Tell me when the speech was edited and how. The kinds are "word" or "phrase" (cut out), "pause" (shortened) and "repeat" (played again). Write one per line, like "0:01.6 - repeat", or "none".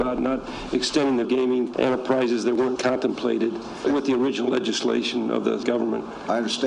0:01.2 - word
0:01.7 - word
0:02.8 - word
0:03.8 - word
0:05.6 - word